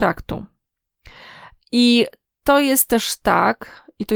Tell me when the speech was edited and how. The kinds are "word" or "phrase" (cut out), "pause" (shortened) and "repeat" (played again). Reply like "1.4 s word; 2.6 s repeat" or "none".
none